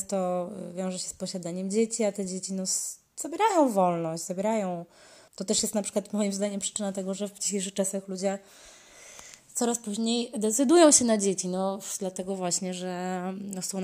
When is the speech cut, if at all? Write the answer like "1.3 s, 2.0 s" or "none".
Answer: 5.3 s

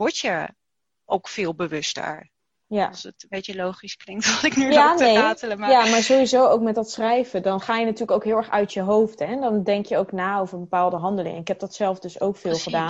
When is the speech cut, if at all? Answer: none

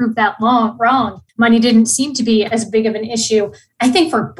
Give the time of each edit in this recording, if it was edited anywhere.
1.3 s

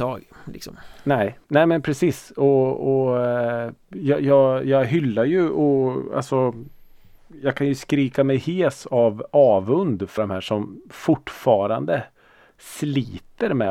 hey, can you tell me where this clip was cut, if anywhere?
1.4 s, 10.2 s

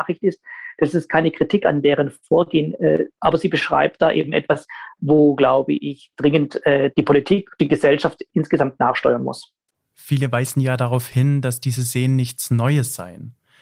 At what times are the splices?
none

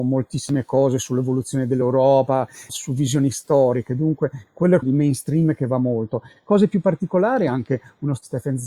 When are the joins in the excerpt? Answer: 2.7 s, 4.8 s

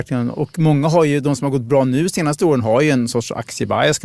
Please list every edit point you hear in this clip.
none

